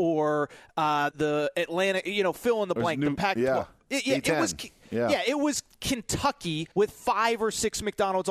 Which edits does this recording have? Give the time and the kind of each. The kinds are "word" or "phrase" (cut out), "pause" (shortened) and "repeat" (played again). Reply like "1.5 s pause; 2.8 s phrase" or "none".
1.1 s word; 6.7 s pause